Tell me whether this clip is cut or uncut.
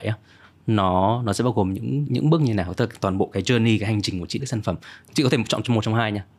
cut